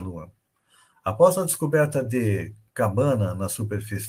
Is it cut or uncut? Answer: uncut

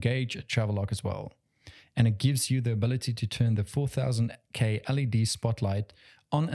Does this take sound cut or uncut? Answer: uncut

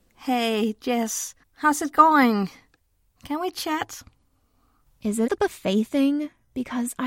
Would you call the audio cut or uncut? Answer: cut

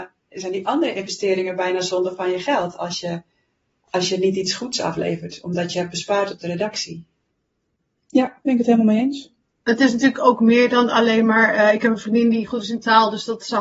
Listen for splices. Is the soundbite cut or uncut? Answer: uncut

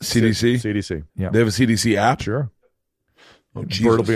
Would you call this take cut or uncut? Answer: cut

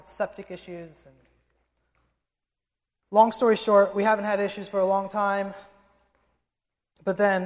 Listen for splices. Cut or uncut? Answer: uncut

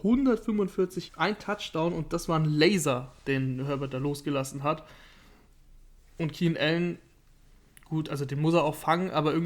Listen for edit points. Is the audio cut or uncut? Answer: cut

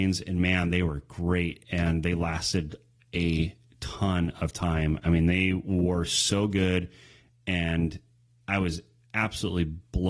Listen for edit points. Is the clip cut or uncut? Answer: uncut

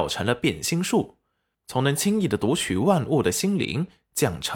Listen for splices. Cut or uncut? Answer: uncut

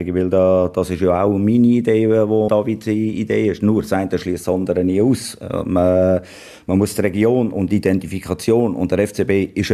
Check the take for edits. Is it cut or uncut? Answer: cut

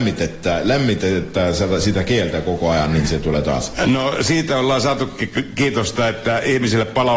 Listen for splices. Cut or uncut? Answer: uncut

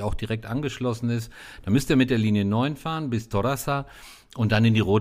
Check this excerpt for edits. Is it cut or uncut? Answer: uncut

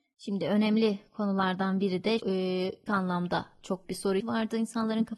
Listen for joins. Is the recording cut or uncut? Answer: cut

